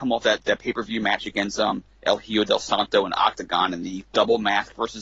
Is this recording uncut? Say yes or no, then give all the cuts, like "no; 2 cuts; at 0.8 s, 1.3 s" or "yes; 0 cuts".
no; 1 cut; at 4.1 s